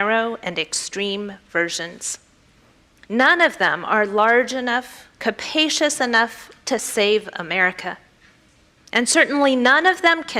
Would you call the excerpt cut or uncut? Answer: uncut